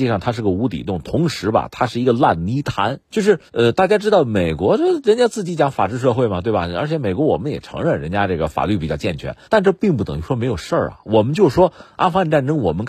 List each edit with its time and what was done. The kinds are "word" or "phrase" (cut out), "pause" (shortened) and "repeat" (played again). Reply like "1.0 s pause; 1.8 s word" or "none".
3.0 s pause; 3.5 s pause; 9.4 s pause